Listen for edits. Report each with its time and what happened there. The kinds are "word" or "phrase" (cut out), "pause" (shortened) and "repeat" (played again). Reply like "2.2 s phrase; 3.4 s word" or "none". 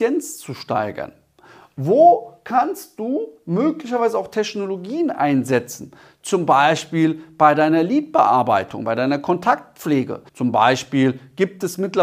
10.3 s pause